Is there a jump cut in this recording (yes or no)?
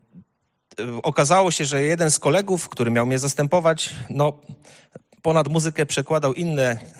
no